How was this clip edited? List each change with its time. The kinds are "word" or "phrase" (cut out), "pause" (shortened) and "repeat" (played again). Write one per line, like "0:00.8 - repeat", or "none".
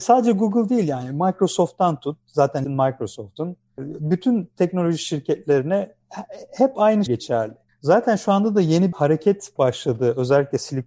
0:02.6 - word
0:07.1 - word
0:08.9 - word